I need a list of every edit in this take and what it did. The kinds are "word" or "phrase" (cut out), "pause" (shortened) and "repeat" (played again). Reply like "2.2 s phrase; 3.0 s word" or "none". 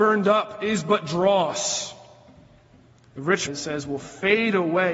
3.5 s word